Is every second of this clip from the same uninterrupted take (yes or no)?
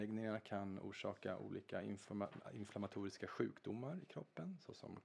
yes